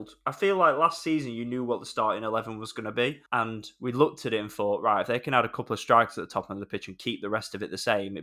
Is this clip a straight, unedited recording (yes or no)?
no